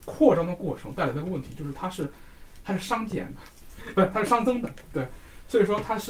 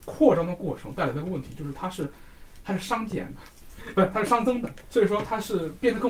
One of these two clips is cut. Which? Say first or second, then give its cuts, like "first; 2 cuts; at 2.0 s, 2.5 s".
second; 1 cut; at 4.9 s